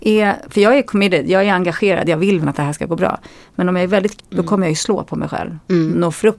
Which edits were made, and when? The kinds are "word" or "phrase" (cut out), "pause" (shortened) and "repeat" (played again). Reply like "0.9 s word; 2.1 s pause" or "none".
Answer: 2.4 s word; 4.2 s phrase